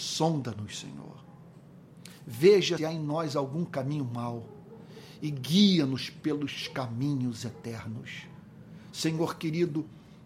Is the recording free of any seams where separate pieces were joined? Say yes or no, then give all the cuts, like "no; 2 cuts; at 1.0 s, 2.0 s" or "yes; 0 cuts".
no; 1 cut; at 2.8 s